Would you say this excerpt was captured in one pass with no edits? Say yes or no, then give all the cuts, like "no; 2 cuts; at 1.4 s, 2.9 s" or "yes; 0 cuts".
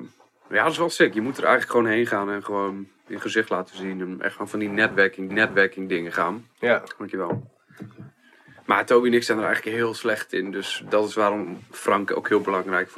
no; 2 cuts; at 5.3 s, 6.5 s